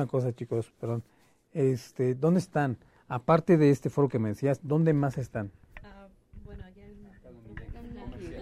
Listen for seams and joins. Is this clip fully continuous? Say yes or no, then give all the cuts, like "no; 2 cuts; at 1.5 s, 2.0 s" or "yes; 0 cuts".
yes; 0 cuts